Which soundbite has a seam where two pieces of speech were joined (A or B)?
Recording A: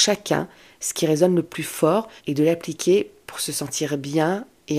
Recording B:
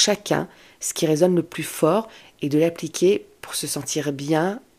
A